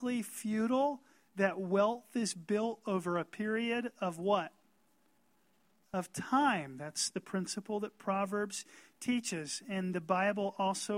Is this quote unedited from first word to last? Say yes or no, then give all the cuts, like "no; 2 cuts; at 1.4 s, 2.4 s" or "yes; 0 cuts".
yes; 0 cuts